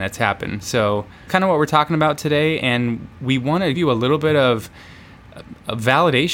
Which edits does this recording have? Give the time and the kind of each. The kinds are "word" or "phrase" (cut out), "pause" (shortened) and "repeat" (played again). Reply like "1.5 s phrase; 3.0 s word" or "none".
1.3 s word; 3.1 s pause; 3.7 s word

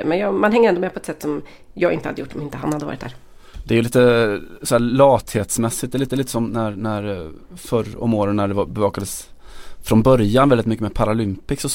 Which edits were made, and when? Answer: 6.1 s repeat

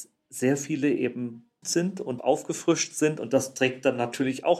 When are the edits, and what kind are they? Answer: 1.6 s word; 2.2 s word

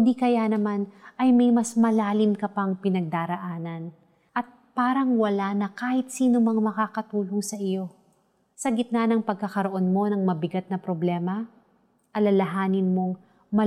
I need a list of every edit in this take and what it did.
none

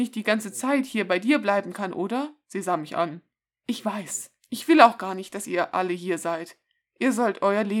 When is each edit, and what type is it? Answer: none

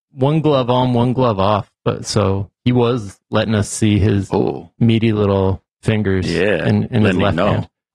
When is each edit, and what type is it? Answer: none

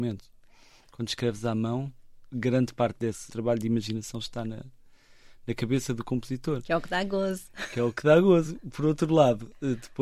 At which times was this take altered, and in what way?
none

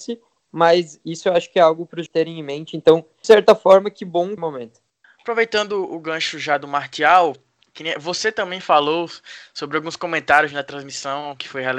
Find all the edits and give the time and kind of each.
2.1 s word; 3.2 s word; 4.4 s phrase; 5.0 s pause

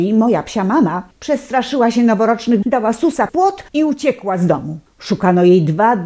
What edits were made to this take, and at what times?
1.1 s pause; 2.6 s word; 3.3 s word; 3.7 s pause; 4.9 s pause

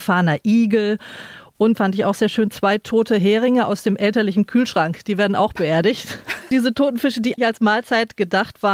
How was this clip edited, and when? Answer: 1.7 s word; 7.4 s word

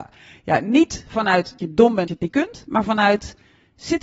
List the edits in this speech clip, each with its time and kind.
1.6 s word; 2.1 s word

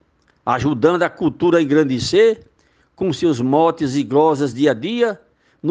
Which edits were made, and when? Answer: none

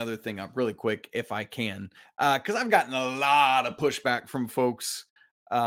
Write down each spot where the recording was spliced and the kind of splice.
none

